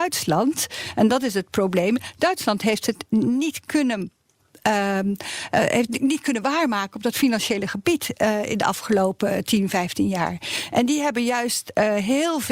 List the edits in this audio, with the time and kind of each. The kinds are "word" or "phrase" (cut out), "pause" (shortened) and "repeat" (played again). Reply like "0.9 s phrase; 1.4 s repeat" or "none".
none